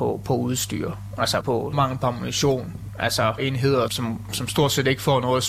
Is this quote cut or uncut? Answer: cut